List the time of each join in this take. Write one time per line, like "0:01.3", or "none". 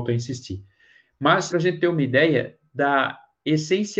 0:01.5